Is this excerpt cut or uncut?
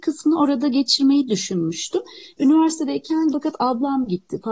cut